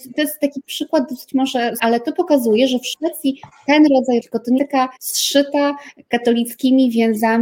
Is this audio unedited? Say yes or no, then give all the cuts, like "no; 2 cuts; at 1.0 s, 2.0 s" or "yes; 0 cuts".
no; 4 cuts; at 1.8 s, 4.2 s, 4.6 s, 5.0 s